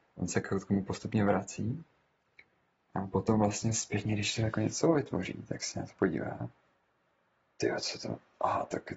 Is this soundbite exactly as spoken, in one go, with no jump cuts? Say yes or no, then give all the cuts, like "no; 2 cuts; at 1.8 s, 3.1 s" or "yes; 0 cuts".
yes; 0 cuts